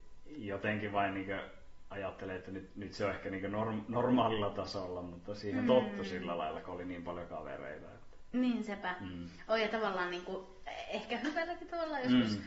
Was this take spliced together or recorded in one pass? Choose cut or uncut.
uncut